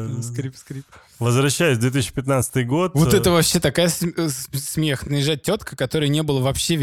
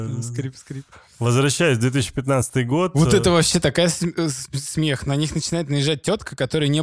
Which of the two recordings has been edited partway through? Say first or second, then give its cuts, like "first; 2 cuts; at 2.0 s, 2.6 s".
first; 1 cut; at 5.1 s